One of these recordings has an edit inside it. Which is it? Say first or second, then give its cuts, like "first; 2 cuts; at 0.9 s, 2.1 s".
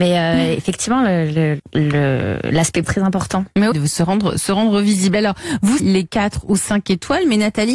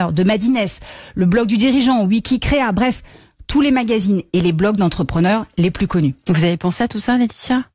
first; 4 cuts; at 1.6 s, 2.8 s, 3.7 s, 5.8 s